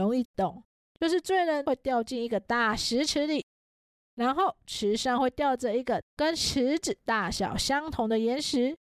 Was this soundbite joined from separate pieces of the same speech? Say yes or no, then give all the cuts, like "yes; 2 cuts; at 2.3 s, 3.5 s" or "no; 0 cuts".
no; 0 cuts